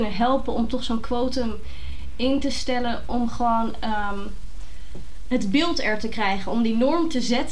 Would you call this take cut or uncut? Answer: uncut